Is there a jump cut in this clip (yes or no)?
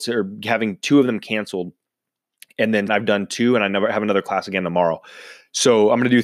yes